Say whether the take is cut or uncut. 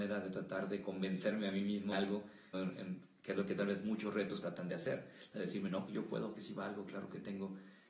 cut